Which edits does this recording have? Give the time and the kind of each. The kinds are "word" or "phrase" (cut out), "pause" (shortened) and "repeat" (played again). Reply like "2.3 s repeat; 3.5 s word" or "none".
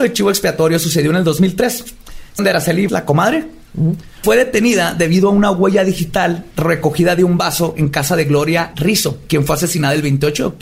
2.4 s word; 2.9 s word; 4.2 s word; 8.7 s word